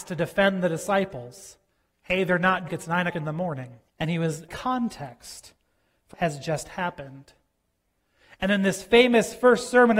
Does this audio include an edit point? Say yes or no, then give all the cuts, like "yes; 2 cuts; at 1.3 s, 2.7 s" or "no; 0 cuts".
yes; 6 cuts; at 1.7 s, 2.7 s, 3.1 s, 3.9 s, 4.5 s, 6.1 s